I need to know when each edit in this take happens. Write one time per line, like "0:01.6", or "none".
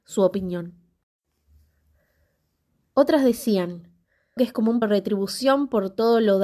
0:04.4
0:04.8